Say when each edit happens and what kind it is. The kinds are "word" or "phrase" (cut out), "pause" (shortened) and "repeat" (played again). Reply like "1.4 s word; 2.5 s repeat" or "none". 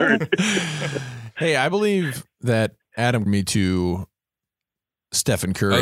2.3 s pause; 3.3 s word